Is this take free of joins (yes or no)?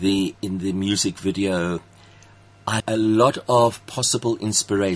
no